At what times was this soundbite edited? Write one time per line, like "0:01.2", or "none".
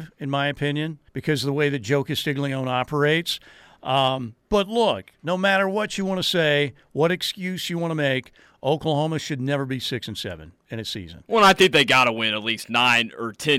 0:01.1